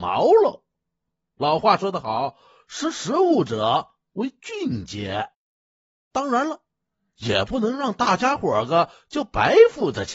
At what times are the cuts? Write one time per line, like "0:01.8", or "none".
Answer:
none